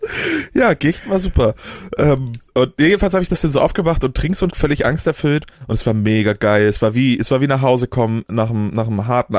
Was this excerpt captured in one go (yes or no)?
no